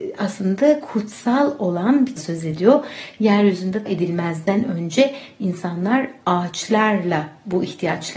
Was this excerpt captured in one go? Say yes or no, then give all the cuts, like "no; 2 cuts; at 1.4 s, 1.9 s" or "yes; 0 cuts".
no; 2 cuts; at 2.2 s, 3.9 s